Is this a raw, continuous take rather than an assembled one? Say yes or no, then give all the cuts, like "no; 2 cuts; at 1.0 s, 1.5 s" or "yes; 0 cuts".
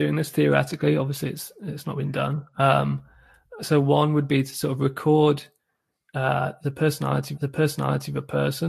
no; 2 cuts; at 3.6 s, 7.3 s